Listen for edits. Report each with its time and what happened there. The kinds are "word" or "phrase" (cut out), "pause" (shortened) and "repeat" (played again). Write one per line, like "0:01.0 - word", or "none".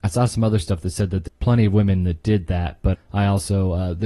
0:01.3 - word
0:02.9 - word

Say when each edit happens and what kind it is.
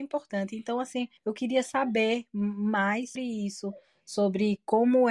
0:01.2 - pause
0:03.2 - word

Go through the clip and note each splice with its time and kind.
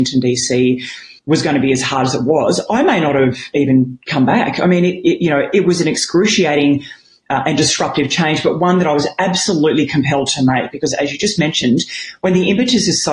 0:01.2 - pause
0:04.0 - pause

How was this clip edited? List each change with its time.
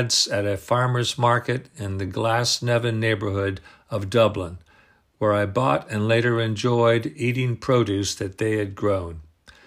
none

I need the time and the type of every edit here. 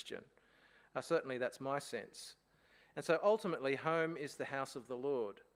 none

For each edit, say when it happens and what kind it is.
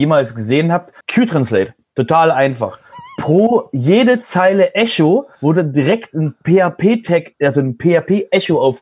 0:01.0 - pause
0:05.3 - pause

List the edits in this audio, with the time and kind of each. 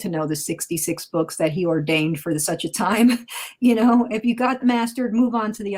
0:04.6 - word

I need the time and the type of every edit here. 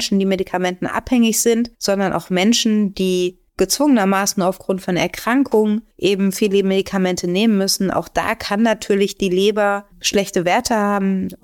0:01.7 - pause
0:03.5 - pause
0:05.9 - pause
0:09.9 - pause

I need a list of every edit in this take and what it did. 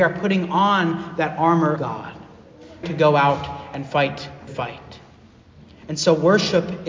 0:01.8 - word
0:02.8 - word
0:04.5 - phrase

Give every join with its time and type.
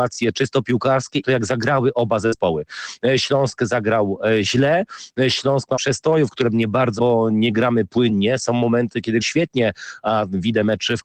0:01.2 - word
0:05.8 - word
0:07.0 - word
0:09.2 - word

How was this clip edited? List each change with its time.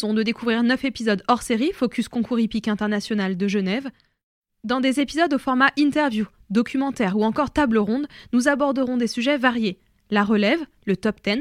none

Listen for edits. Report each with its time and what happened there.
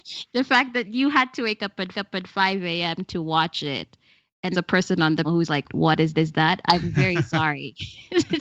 0:01.9 - repeat
0:04.5 - phrase
0:05.2 - word
0:05.7 - word
0:06.1 - repeat

